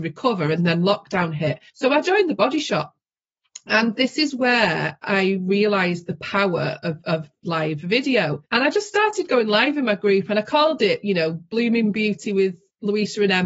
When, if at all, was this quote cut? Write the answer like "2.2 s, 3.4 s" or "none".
1.7 s, 8.4 s